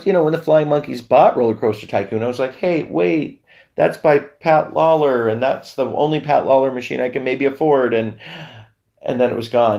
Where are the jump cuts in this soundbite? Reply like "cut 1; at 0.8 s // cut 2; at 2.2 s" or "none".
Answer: none